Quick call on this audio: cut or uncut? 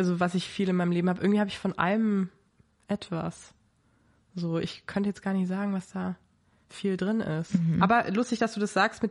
uncut